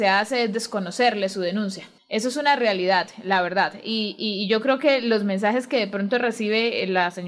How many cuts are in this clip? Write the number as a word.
zero